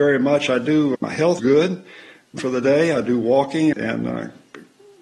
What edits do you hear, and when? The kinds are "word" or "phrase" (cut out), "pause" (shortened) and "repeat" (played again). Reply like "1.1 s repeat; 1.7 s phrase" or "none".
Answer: 0.9 s word; 1.4 s word; 2.4 s word; 3.7 s word